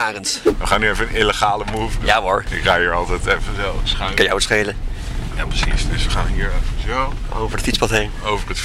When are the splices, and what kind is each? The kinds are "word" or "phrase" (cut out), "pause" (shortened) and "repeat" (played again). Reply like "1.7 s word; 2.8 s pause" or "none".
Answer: none